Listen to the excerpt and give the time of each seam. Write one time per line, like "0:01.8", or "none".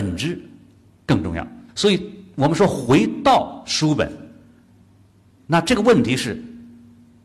0:01.7